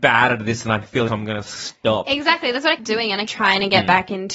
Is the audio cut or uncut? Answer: cut